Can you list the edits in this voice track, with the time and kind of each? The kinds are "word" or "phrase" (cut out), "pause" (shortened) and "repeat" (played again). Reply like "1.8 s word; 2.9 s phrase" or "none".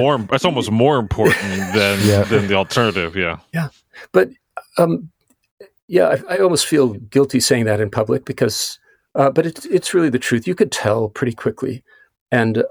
none